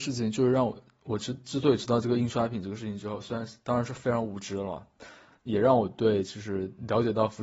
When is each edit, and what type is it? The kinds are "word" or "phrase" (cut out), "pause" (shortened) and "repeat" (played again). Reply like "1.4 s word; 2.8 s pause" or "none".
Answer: none

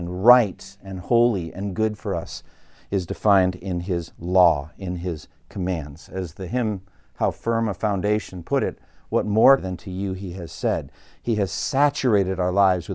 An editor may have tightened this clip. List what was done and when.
9.6 s phrase

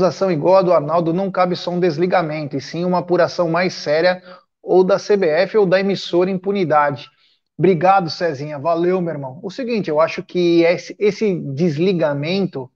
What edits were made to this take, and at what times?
none

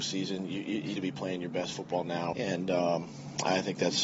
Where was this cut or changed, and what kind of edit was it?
0.9 s word; 2.3 s word

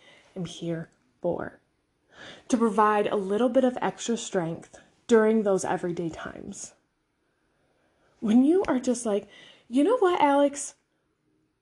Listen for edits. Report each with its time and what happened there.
none

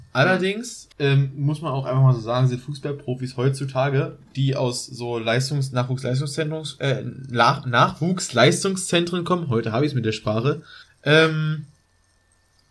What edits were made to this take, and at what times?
0.9 s pause; 10.8 s pause

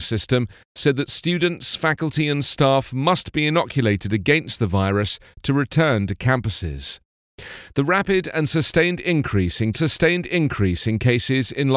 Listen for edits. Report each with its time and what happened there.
9.7 s repeat

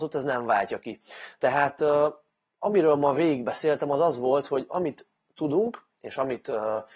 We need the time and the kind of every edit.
none

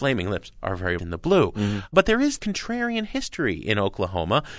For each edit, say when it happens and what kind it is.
1.0 s word; 2.4 s word

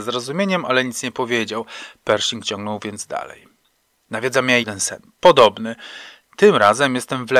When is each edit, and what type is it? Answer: 4.6 s word

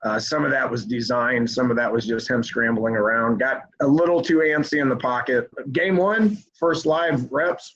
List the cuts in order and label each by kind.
6.5 s pause

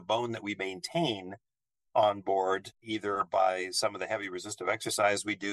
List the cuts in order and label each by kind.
none

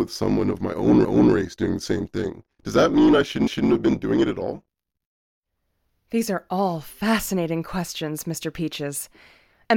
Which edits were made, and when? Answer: 1.0 s repeat; 2.5 s pause; 3.5 s repeat

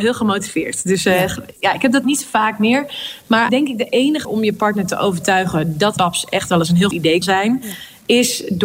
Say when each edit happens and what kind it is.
2.0 s word; 3.5 s word; 4.2 s word; 6.0 s word; 6.9 s word; 7.2 s word

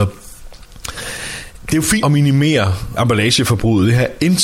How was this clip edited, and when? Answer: 2.0 s word; 3.0 s word

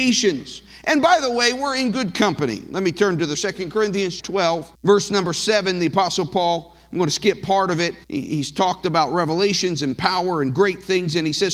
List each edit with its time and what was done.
3.3 s word; 4.2 s word; 4.7 s pause; 8.0 s pause

